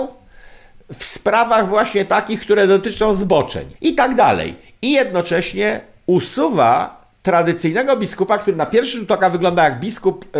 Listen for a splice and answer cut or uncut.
cut